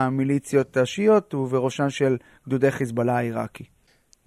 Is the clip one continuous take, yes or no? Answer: yes